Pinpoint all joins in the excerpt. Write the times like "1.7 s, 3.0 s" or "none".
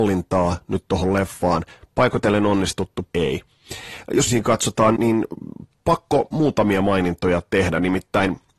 3.1 s, 4.3 s, 5.0 s